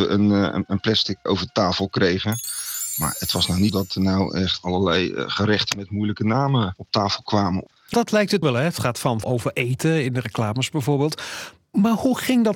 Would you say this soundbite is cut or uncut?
cut